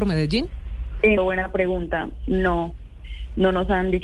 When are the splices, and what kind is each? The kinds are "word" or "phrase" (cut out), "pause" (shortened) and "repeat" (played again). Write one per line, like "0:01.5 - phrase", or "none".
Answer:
0:01.2 - word